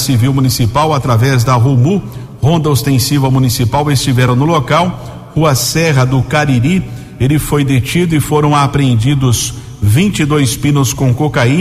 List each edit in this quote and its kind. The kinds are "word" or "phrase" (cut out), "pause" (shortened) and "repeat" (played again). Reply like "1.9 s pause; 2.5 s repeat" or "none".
none